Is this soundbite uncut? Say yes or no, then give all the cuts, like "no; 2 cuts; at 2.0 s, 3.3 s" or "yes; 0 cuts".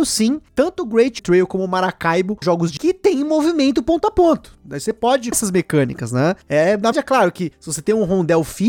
no; 5 cuts; at 1.2 s, 2.4 s, 2.8 s, 5.3 s, 6.9 s